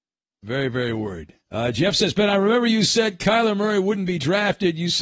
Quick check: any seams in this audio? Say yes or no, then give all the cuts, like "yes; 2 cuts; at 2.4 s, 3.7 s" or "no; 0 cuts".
yes; 1 cut; at 1.4 s